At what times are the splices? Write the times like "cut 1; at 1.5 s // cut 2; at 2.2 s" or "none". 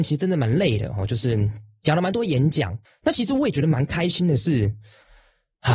cut 1; at 2.8 s